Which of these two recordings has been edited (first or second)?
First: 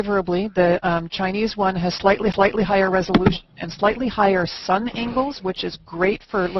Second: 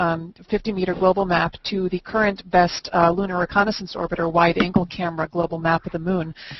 first